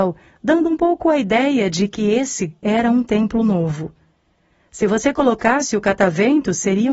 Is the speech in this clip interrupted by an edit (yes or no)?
no